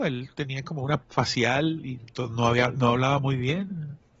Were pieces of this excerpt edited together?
yes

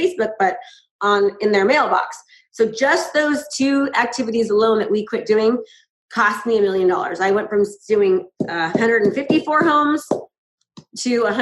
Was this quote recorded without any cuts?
yes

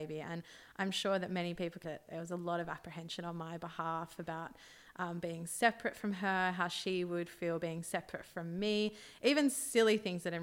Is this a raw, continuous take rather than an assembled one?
no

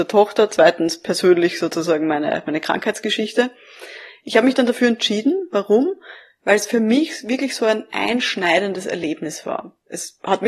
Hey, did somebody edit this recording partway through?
no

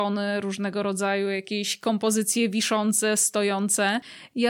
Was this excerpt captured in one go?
yes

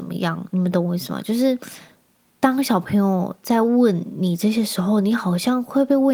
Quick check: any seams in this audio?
no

